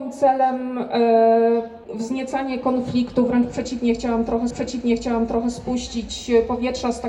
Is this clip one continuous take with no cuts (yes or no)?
no